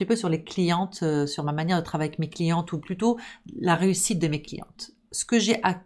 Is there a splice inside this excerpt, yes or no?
no